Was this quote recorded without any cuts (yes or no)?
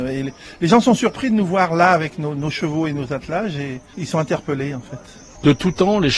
yes